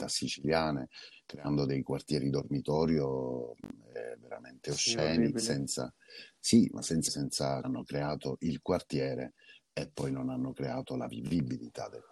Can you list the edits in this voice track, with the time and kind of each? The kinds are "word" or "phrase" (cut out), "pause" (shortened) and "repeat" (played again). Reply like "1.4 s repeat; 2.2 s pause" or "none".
7.1 s word; 7.6 s word